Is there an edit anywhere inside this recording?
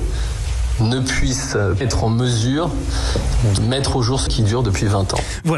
yes; 3 cuts; at 1.8 s, 3.6 s, 4.3 s

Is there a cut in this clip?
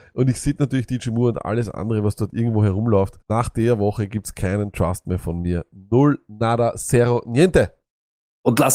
yes; 1 cut; at 3.2 s

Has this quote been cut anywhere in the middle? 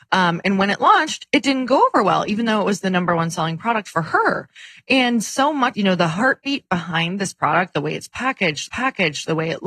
yes; 2 cuts; at 5.7 s, 8.7 s

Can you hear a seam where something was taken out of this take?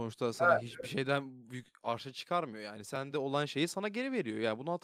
no; 0 cuts

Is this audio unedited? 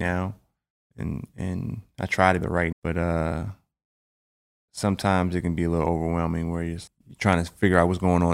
no; 3 cuts; at 2.4 s, 2.7 s, 6.9 s

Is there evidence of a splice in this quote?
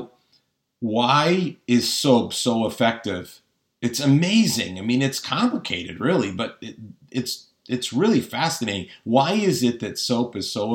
no; 0 cuts

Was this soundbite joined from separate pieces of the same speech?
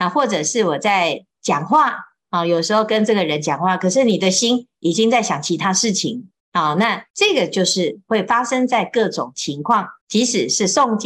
yes; 4 cuts; at 1.3 s, 6.4 s, 7.1 s, 10.0 s

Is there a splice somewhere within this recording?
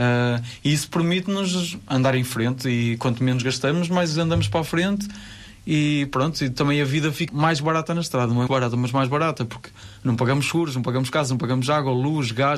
yes; 2 cuts; at 7.3 s, 8.5 s

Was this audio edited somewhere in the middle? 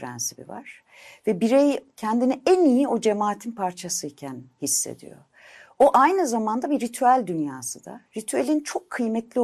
no; 0 cuts

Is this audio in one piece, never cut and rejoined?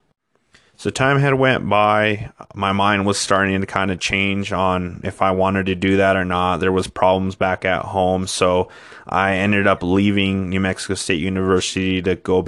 yes; 0 cuts

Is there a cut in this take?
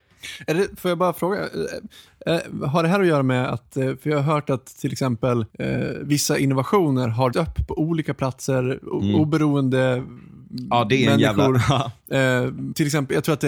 yes; 2 cuts; at 5.5 s, 7.3 s

